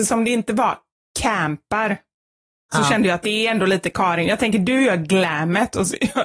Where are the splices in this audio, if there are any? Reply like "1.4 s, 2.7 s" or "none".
none